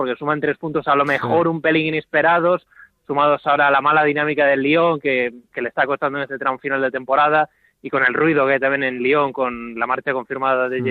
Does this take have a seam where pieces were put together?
no; 0 cuts

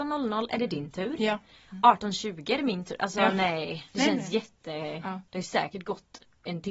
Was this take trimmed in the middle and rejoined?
yes; 2 cuts; at 3.9 s, 5.3 s

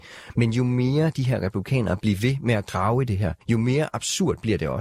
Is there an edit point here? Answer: yes; 1 cut; at 3.4 s

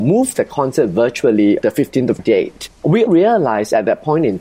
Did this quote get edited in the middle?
yes; 3 cuts; at 1.6 s, 2.2 s, 3.1 s

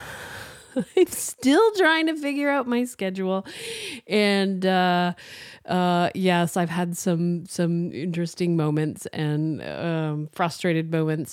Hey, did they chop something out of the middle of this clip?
no; 0 cuts

